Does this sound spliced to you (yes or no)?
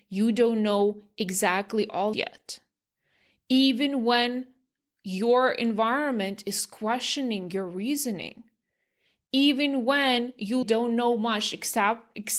yes